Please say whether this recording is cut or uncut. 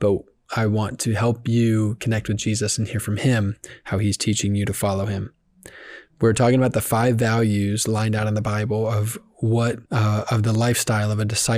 cut